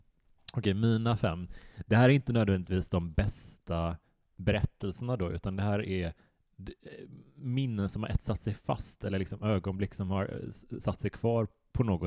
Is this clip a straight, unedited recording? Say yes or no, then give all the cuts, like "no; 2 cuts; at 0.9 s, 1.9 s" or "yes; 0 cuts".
yes; 0 cuts